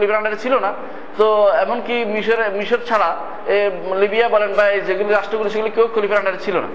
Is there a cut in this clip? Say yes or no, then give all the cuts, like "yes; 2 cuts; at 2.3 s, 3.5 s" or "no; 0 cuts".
no; 0 cuts